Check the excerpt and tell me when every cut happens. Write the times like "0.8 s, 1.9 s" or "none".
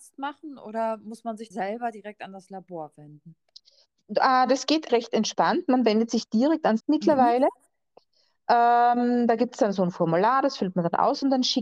1.5 s, 4.9 s, 6.8 s